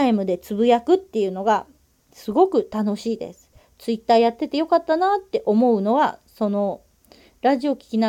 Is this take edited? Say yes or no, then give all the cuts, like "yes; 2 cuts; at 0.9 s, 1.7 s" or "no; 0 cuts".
no; 0 cuts